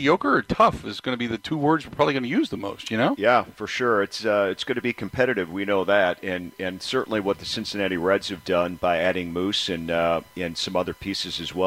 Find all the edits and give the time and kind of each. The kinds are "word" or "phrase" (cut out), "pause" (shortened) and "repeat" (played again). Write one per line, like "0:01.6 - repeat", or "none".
none